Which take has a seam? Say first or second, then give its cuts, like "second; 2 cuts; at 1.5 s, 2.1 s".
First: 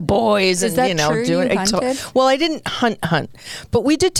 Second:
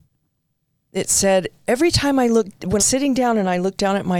second; 1 cut; at 2.8 s